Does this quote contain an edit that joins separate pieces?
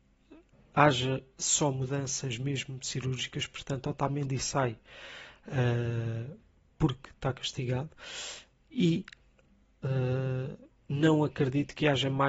no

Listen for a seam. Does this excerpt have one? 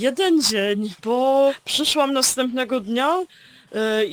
no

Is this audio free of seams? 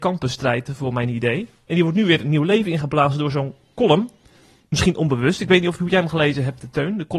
yes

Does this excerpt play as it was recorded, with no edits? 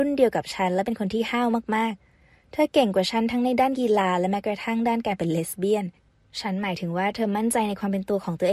yes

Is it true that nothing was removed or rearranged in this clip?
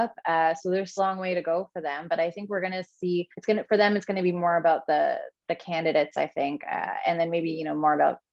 no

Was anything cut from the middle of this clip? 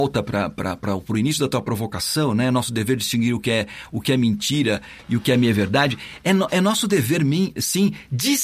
no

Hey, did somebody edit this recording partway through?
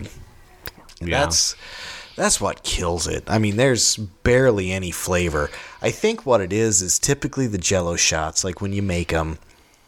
no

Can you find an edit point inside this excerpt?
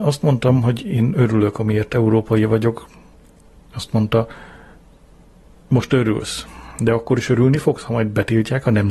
no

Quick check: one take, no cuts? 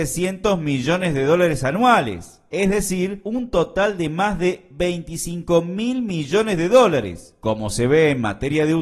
yes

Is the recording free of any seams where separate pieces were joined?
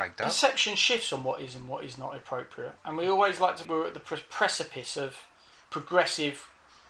no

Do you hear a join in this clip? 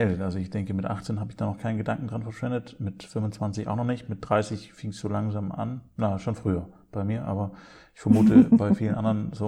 no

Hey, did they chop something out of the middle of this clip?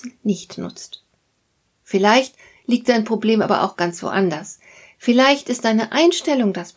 no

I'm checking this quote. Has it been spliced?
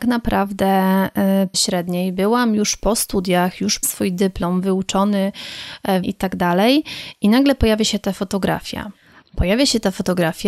yes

